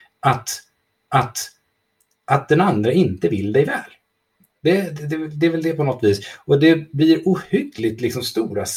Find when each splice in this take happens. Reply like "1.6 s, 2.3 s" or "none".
1.0 s